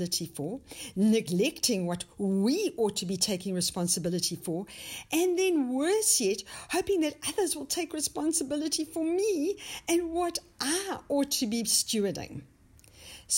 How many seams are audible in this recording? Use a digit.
0